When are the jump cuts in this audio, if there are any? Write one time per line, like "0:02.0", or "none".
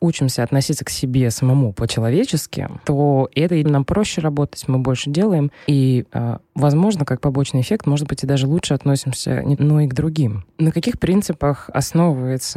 0:03.6
0:09.6